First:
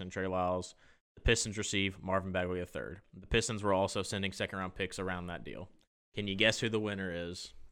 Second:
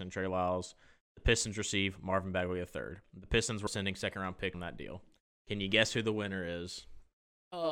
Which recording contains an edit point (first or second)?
second